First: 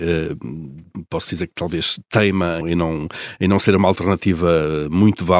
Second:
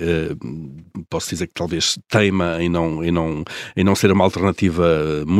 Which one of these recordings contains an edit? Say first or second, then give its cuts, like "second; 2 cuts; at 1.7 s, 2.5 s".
first; 1 cut; at 2.6 s